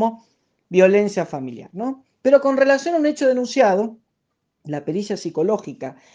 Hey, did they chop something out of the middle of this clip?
no; 0 cuts

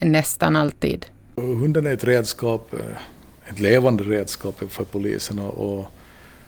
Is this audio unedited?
yes; 0 cuts

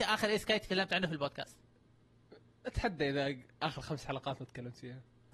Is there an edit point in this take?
no; 0 cuts

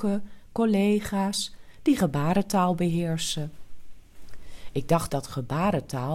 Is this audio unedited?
no; 1 cut; at 5.1 s

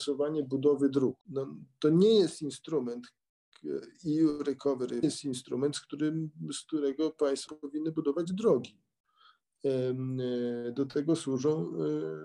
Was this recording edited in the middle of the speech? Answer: yes; 3 cuts; at 1.2 s, 5.0 s, 7.5 s

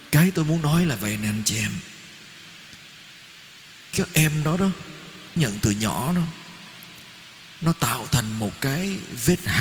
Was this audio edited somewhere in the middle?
yes; 2 cuts; at 3.9 s, 5.4 s

